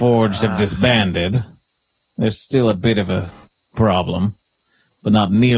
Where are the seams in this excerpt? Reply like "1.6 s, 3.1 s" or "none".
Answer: none